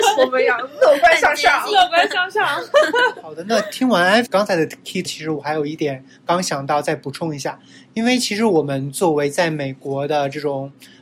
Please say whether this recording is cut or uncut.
cut